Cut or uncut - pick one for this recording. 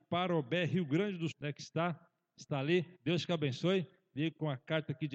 cut